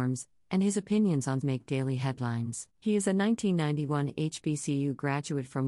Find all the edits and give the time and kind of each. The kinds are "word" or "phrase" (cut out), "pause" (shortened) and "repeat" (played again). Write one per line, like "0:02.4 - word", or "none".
0:01.4 - word
0:02.7 - pause